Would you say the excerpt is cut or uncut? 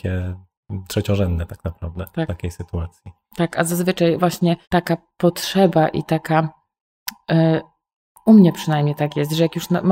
cut